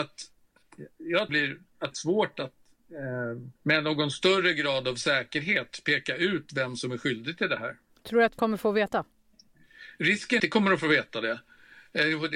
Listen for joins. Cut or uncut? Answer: cut